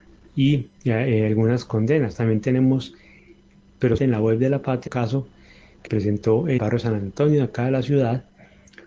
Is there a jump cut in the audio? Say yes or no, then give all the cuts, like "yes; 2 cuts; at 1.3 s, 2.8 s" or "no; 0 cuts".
yes; 4 cuts; at 4.0 s, 4.9 s, 5.9 s, 6.6 s